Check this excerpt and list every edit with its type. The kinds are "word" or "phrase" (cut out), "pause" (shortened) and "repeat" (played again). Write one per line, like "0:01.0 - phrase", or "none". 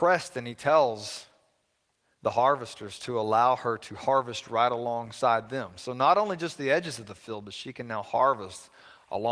none

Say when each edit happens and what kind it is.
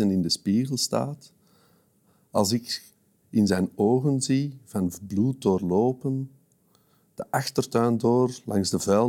none

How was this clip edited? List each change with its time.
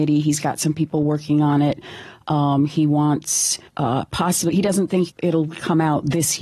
0:03.7 - pause
0:05.1 - word

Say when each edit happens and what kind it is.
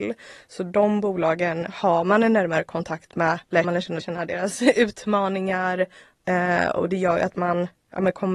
0:03.6 - word
0:04.0 - phrase

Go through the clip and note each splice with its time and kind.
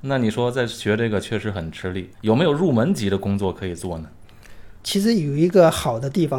0:02.1 - pause

